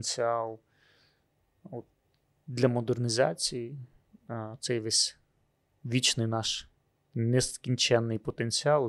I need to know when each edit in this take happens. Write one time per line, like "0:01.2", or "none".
none